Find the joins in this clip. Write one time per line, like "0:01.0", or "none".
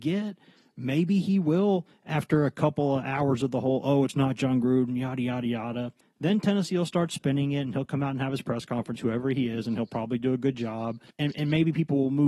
0:06.0
0:11.1

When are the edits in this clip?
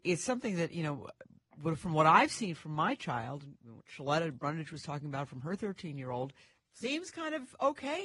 none

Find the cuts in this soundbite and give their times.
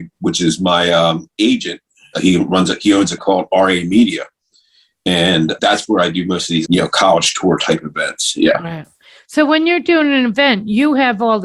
0:02.1
0:03.2
0:05.6
0:06.6

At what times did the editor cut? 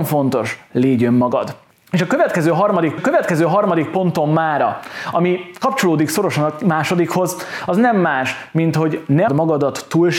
0:01.7
0:03.0
0:09.3

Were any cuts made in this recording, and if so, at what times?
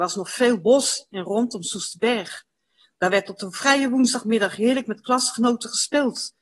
0:01.1

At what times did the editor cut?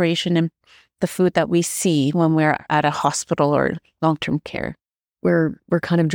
none

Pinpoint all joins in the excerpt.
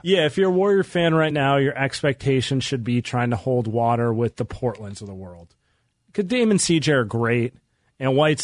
none

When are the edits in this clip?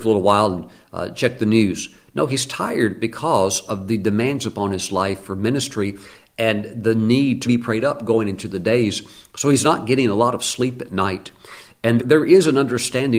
0:07.4
0:12.0

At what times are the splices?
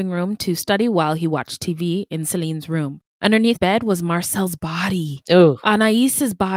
0:03.6

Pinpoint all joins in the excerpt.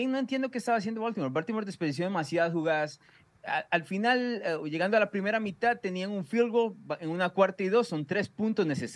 none

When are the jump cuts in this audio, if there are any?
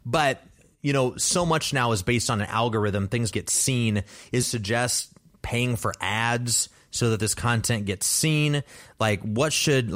0:03.3
0:04.4

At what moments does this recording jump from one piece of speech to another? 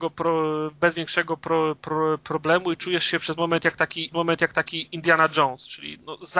0:04.1

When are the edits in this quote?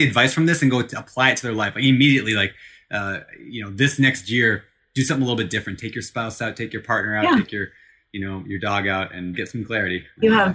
0:09.3

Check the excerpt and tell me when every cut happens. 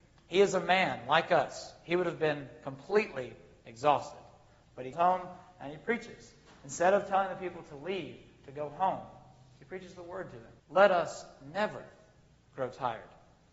0:04.9
0:10.6

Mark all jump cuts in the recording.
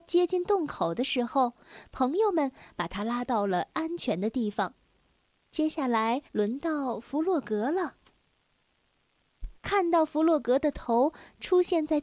0:06.3
0:09.6

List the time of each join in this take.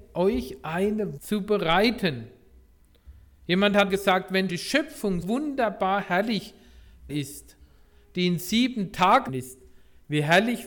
0:01.2
0:03.9
0:04.5
0:05.2
0:07.1
0:09.3

